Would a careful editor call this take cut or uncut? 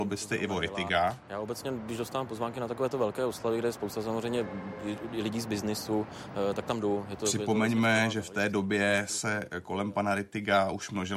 uncut